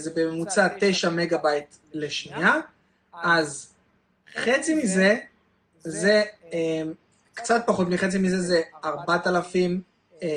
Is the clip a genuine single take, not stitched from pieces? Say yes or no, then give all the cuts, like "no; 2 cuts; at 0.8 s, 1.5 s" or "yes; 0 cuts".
yes; 0 cuts